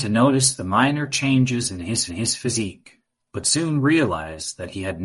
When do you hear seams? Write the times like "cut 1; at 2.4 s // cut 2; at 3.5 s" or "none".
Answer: cut 1; at 2.1 s